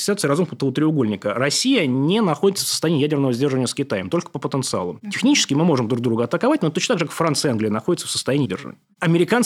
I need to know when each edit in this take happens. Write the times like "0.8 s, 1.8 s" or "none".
8.5 s